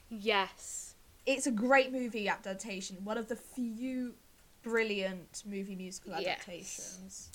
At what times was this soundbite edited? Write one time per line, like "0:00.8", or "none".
none